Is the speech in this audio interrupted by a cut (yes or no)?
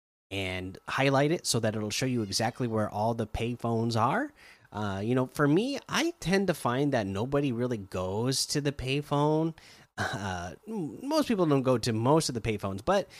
no